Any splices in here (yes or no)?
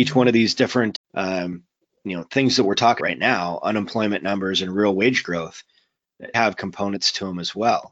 yes